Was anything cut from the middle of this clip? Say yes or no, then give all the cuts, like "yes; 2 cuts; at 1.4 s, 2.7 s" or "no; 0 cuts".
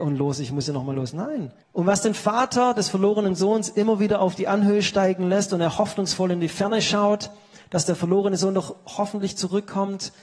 yes; 1 cut; at 1.6 s